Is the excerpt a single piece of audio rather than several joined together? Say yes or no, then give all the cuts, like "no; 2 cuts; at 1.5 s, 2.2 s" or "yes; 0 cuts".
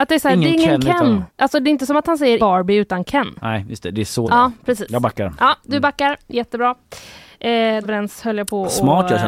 no; 4 cuts; at 1.3 s, 2.4 s, 4.2 s, 7.8 s